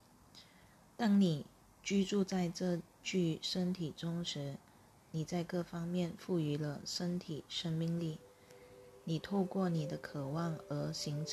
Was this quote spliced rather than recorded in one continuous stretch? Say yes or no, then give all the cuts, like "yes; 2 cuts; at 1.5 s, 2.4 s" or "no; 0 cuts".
no; 0 cuts